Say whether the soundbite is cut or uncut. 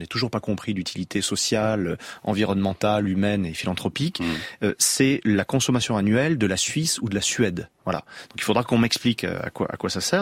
uncut